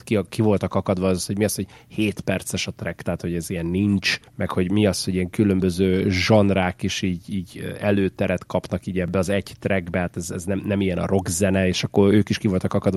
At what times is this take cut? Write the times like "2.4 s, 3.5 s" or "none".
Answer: 4.3 s

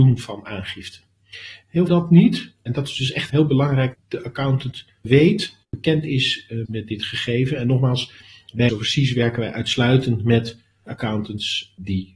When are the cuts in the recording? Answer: 1.9 s, 3.3 s, 3.9 s, 5.6 s, 6.7 s, 8.7 s

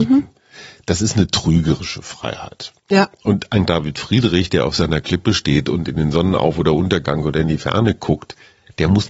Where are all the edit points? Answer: 2.8 s, 3.7 s

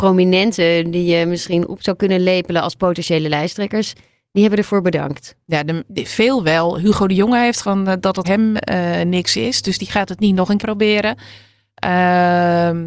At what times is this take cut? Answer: 7.6 s, 8.2 s, 8.6 s, 10.6 s

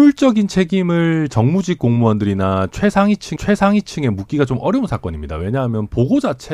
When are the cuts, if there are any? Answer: 3.4 s

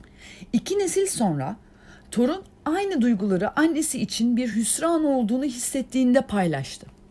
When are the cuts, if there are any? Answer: none

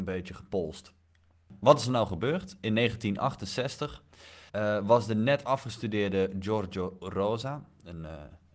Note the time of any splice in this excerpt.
4.5 s

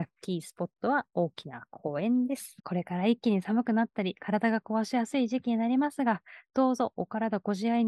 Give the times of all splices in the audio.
2.6 s

